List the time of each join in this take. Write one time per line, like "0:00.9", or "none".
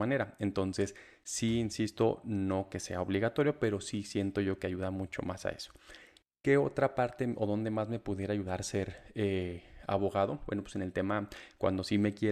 none